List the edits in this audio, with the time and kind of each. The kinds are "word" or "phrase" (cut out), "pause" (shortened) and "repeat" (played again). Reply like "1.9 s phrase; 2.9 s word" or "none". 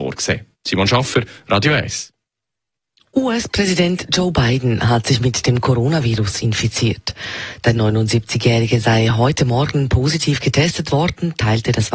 none

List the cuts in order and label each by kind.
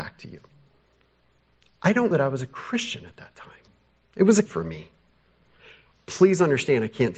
2.1 s word; 3.7 s pause; 4.5 s word

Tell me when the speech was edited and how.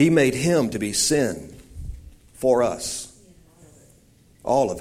none

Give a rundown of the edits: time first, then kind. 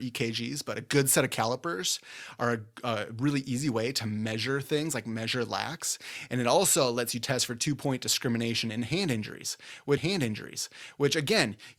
10.0 s repeat

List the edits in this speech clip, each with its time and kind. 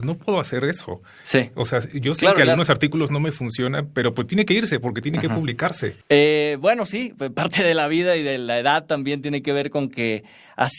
6.0 s pause

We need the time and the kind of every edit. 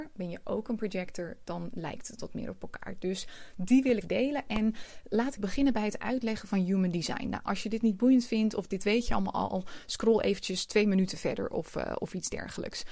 4.0 s word; 5.4 s word

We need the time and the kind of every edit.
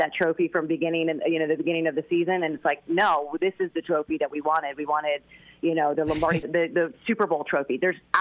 5.9 s word; 6.4 s phrase

